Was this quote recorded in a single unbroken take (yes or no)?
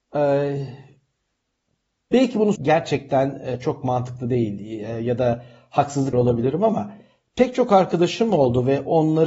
no